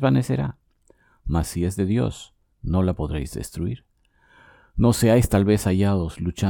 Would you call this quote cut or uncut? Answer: uncut